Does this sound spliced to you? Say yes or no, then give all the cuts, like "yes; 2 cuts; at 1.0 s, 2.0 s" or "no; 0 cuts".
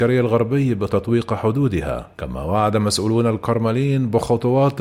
yes; 1 cut; at 2.1 s